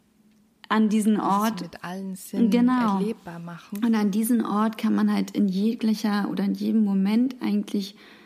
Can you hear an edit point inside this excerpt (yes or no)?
no